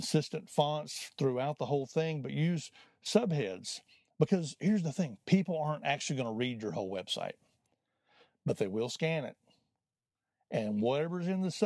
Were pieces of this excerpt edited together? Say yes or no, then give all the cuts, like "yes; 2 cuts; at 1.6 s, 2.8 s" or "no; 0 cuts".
no; 0 cuts